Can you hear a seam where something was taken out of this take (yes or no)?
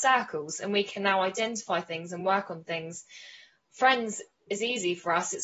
no